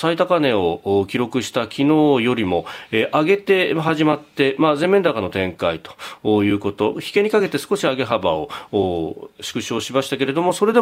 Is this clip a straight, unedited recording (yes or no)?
no